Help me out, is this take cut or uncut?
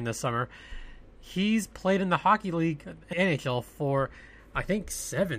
cut